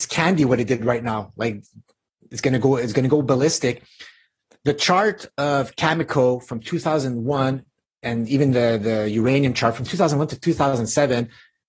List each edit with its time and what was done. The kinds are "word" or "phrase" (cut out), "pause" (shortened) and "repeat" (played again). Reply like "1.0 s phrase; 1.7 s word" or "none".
none